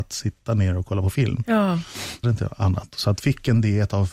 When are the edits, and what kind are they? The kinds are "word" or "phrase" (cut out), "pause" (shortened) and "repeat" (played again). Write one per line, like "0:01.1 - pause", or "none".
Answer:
0:02.2 - phrase
0:03.2 - word